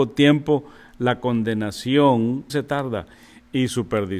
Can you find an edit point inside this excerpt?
yes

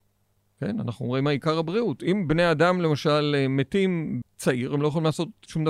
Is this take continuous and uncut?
no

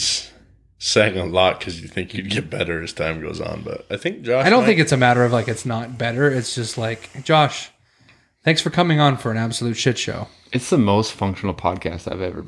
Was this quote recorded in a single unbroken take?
yes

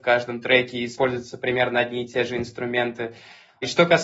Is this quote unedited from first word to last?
yes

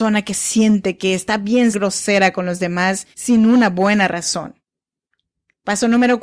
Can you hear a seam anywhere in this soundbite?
yes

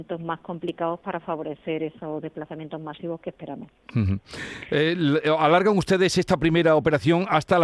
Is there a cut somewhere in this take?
no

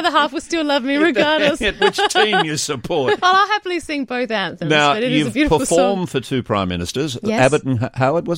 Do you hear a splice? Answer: yes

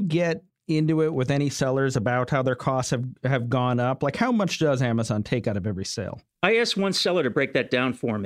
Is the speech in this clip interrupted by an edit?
yes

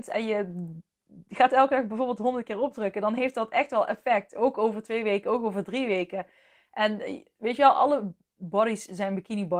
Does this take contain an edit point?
no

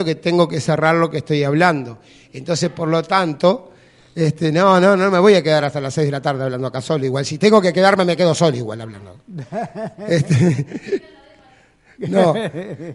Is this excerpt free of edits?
yes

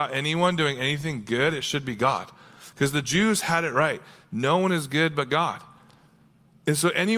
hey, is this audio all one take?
yes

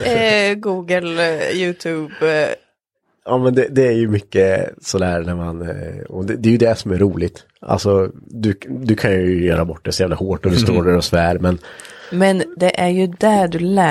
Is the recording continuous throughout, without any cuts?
yes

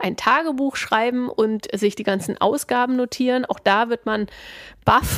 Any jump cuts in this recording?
no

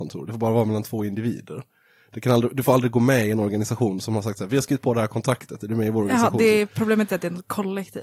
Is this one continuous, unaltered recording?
yes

